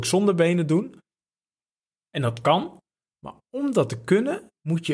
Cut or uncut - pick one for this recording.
uncut